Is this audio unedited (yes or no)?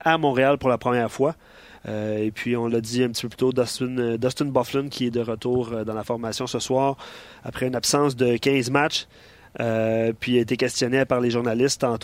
yes